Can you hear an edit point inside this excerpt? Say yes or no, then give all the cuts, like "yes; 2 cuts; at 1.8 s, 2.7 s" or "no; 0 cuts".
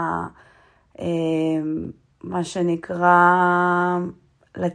no; 0 cuts